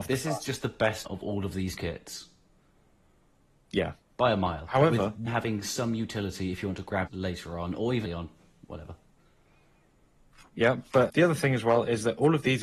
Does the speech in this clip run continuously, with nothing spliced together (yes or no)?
no